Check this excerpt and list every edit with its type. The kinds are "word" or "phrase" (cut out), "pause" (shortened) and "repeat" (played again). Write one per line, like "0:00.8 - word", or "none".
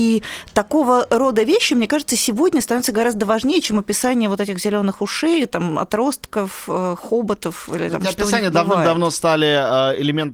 none